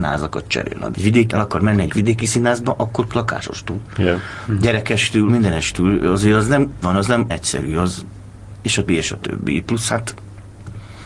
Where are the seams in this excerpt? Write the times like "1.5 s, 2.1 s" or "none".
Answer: 0.9 s, 1.3 s, 1.9 s, 3.1 s, 5.3 s, 6.8 s, 7.3 s, 8.9 s